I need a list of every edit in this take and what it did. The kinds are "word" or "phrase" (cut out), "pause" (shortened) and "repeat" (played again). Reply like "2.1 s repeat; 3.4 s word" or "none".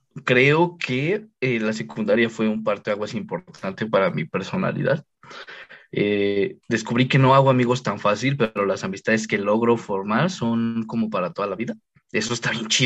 none